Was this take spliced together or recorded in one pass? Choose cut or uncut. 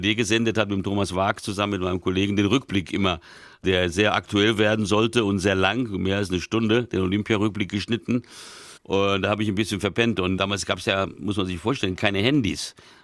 uncut